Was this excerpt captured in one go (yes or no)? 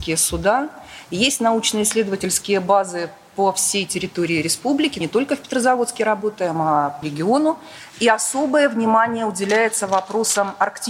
no